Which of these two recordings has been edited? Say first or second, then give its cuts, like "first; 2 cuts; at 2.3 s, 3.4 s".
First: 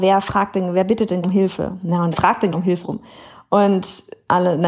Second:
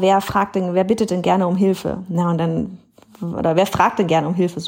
first; 4 cuts; at 1.2 s, 2.1 s, 2.5 s, 2.8 s